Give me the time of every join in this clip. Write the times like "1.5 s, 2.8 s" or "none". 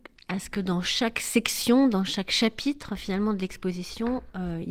none